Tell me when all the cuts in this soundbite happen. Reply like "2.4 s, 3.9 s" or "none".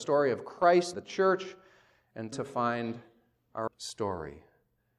0.9 s, 2.3 s, 3.7 s